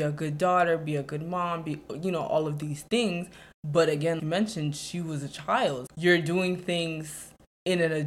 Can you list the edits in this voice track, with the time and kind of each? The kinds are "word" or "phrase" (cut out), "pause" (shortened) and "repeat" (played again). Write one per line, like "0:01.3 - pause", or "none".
0:04.2 - word
0:05.9 - word